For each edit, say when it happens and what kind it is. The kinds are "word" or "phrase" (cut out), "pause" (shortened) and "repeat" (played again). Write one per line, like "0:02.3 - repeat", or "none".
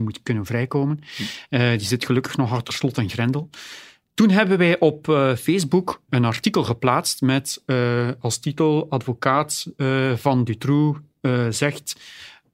0:06.1 - word